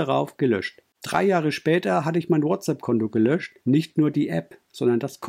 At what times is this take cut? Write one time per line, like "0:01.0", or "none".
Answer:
0:03.6